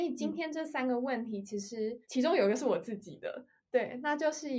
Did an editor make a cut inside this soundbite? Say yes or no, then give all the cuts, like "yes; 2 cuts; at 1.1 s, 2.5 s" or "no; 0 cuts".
yes; 1 cut; at 2.0 s